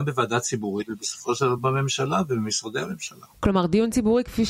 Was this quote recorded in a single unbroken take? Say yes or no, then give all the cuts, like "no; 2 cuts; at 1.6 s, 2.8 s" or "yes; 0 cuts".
yes; 0 cuts